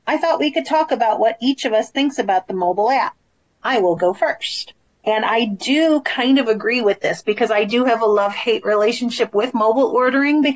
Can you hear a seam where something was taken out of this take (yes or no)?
no